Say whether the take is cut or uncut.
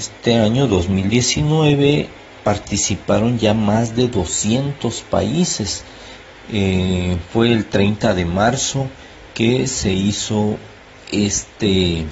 uncut